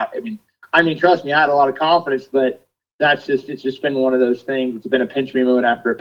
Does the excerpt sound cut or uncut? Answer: uncut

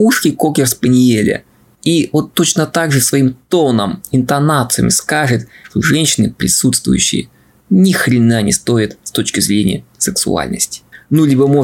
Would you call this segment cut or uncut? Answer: uncut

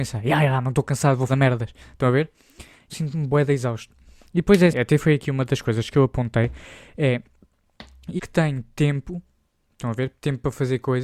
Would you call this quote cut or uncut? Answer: cut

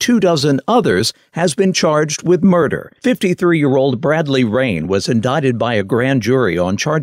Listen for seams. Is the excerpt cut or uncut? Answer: cut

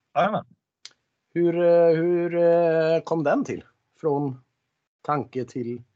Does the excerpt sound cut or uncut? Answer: uncut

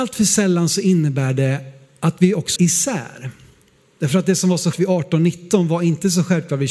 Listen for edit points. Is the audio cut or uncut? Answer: cut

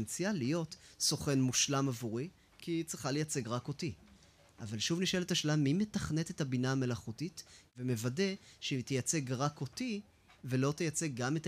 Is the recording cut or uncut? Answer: uncut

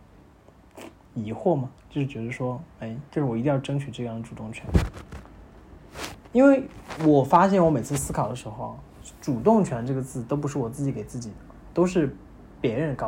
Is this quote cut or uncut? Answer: cut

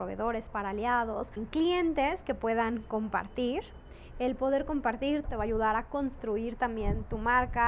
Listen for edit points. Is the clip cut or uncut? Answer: cut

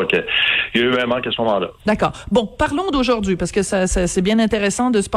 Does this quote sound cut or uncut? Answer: cut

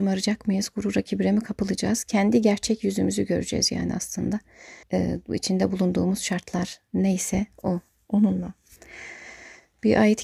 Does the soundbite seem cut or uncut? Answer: cut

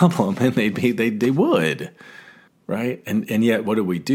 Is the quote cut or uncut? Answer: cut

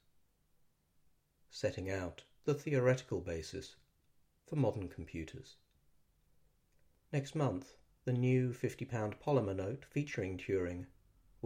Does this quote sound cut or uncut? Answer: uncut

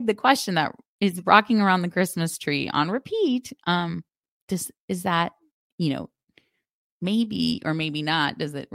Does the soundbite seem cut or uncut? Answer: uncut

